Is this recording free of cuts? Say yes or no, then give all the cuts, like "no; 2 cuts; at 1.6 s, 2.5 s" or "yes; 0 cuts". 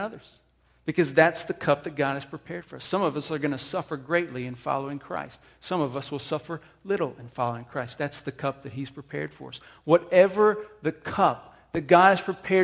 yes; 0 cuts